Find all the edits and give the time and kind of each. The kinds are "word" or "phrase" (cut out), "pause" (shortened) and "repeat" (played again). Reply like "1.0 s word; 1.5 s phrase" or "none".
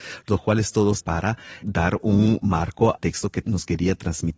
1.0 s word; 1.6 s word; 3.0 s word; 3.4 s word